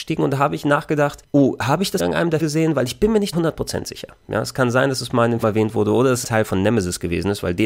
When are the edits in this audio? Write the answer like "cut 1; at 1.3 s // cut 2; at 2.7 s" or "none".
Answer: cut 1; at 2.0 s // cut 2; at 2.4 s // cut 3; at 3.3 s // cut 4; at 5.4 s // cut 5; at 6.2 s